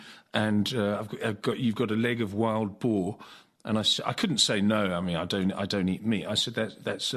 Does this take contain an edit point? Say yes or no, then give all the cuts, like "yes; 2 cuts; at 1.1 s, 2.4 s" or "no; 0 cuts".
no; 0 cuts